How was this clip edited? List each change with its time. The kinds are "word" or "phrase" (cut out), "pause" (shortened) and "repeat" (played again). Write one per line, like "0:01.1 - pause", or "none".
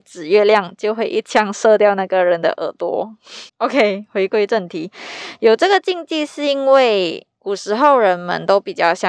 0:03.5 - pause
0:07.3 - pause

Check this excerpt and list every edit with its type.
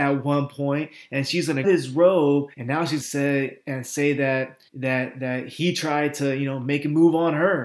0:01.6 - word
0:02.5 - pause
0:03.0 - phrase
0:04.7 - pause

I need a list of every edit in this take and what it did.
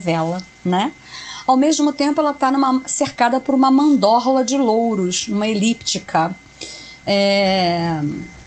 none

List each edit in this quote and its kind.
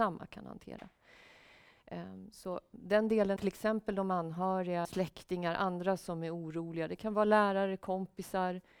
0:02.7 - word
0:03.4 - word
0:04.8 - phrase

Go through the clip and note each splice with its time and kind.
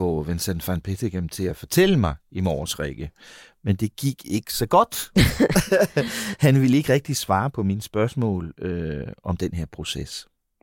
none

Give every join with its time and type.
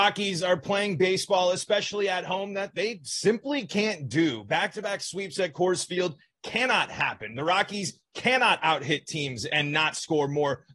none

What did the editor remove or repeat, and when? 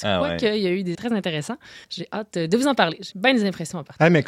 0:00.9 - word
0:01.8 - pause
0:03.1 - word

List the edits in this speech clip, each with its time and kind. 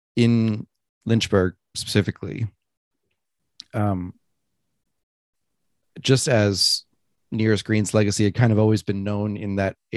none

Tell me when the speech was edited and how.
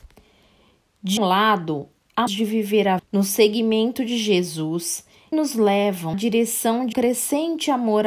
0:01.2 - word
0:02.3 - word
0:03.0 - word
0:05.3 - word
0:06.1 - word
0:06.9 - word

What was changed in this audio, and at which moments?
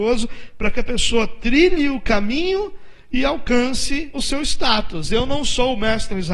0:04.1 - word

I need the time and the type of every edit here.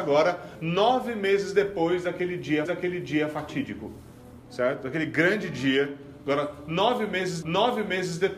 0:02.6 - repeat
0:07.4 - repeat

